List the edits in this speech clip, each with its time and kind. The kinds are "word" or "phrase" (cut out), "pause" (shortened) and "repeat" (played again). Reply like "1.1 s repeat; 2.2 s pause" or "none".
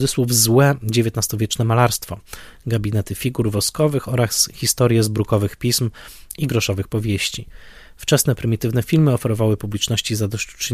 none